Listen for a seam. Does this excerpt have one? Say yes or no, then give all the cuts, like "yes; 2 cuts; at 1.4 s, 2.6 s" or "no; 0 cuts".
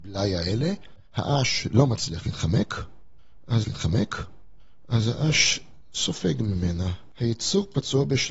yes; 2 cuts; at 1.1 s, 3.6 s